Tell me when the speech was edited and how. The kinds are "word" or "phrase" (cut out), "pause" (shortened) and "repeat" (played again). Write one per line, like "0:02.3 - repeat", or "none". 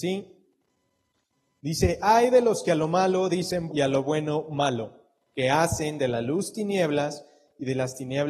0:03.7 - word